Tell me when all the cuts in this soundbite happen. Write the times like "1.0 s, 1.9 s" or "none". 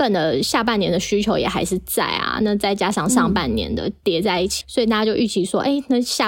4.6 s